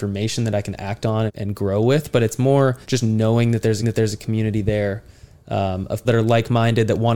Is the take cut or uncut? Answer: cut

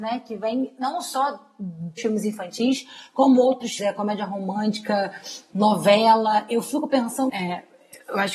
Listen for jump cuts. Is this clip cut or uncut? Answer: cut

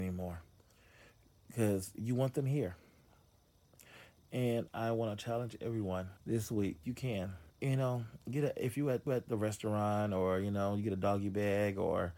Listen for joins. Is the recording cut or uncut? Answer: cut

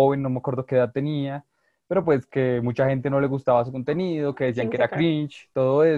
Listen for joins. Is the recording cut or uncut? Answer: uncut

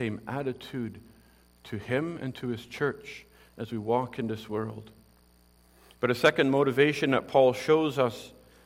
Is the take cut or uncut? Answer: uncut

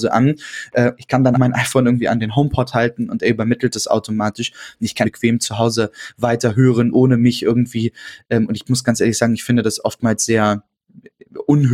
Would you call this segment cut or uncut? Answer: cut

